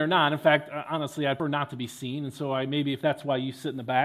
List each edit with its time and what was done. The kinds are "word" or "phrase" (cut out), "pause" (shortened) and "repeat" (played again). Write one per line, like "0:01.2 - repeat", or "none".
0:01.4 - word